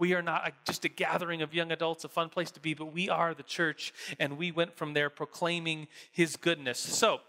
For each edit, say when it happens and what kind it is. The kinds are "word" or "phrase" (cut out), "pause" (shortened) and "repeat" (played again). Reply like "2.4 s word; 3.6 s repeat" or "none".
none